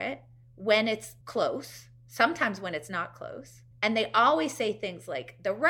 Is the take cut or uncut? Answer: cut